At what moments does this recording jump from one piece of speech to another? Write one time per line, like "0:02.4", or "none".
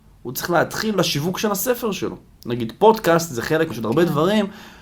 0:00.9
0:03.7